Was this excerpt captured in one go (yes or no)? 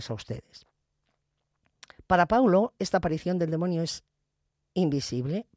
yes